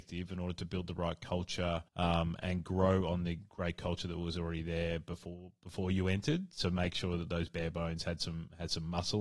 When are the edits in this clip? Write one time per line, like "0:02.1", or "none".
0:01.9